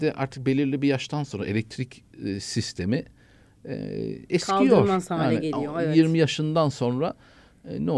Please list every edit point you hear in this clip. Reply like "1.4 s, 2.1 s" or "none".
none